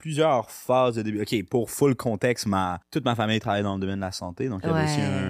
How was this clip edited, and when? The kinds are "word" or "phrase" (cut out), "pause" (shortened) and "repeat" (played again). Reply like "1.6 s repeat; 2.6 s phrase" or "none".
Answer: 2.8 s pause